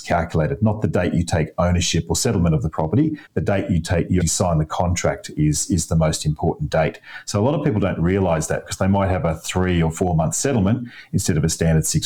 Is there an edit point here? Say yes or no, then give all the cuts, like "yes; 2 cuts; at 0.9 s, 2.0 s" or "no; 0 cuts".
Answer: yes; 2 cuts; at 3.3 s, 4.2 s